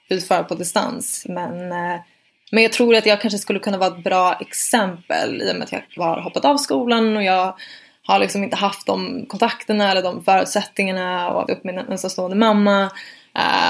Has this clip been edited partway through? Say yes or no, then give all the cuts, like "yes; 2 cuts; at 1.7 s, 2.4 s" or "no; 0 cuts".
yes; 2 cuts; at 6.0 s, 11.5 s